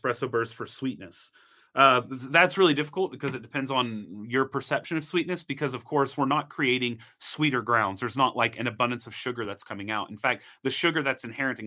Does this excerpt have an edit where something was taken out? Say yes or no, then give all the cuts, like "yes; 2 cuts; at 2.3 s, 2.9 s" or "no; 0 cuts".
no; 0 cuts